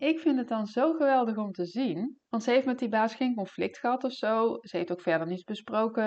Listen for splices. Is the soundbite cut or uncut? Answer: cut